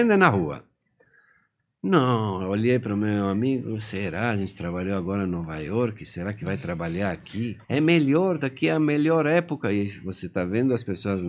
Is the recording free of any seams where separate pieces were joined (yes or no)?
no